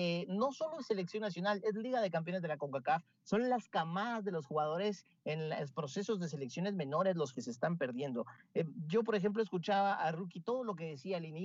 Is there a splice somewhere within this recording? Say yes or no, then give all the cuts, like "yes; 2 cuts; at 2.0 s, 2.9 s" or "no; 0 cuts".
no; 0 cuts